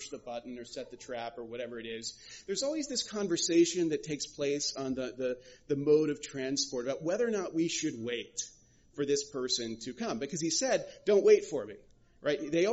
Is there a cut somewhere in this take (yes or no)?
no